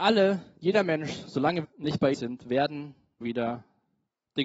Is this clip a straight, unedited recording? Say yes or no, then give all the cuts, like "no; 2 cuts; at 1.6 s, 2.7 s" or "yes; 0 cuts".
no; 3 cuts; at 1.6 s, 2.1 s, 3.2 s